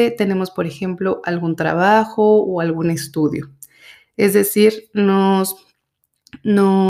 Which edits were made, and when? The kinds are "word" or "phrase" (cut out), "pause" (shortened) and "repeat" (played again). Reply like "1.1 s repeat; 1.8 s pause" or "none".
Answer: none